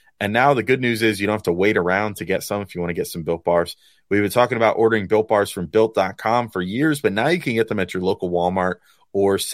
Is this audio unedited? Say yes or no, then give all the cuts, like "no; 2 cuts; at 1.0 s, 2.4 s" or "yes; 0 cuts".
yes; 0 cuts